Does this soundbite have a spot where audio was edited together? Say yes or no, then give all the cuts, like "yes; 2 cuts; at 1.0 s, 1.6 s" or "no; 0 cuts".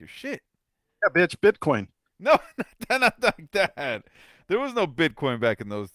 no; 0 cuts